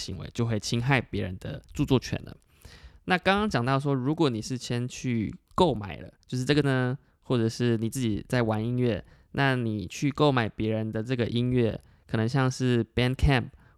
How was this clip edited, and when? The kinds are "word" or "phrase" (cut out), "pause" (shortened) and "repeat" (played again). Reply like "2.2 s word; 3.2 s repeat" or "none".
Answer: 1.7 s pause; 6.2 s pause; 6.6 s word